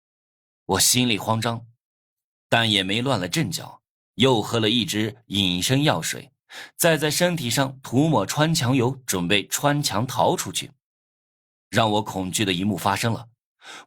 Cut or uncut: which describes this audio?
uncut